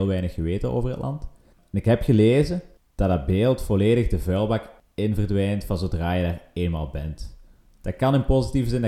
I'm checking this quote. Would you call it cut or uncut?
uncut